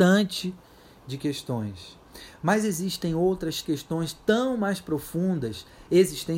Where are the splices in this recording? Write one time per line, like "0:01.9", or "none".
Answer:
0:03.6